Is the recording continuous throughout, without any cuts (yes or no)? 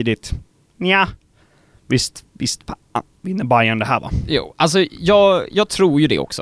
yes